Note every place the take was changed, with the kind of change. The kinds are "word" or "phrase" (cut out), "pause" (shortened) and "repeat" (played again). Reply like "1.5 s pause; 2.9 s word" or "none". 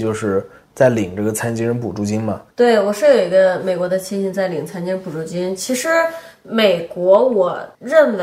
2.5 s pause